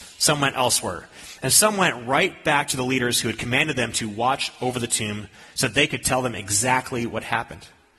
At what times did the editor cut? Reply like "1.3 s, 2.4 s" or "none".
none